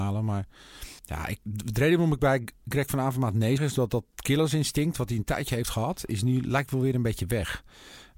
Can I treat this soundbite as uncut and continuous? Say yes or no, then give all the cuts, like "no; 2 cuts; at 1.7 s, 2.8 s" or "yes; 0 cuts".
no; 3 cuts; at 1.0 s, 1.4 s, 3.6 s